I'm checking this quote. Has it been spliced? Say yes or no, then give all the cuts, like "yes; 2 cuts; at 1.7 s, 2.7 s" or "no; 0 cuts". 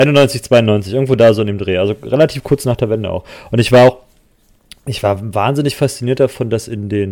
no; 0 cuts